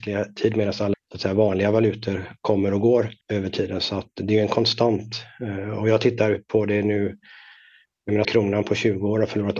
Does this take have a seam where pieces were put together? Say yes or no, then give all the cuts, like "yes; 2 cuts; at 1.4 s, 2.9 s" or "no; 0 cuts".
yes; 3 cuts; at 0.9 s, 3.2 s, 8.2 s